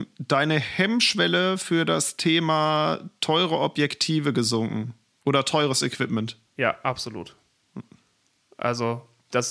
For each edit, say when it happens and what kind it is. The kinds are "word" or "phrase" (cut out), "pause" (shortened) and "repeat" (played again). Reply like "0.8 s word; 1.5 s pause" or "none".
6.5 s pause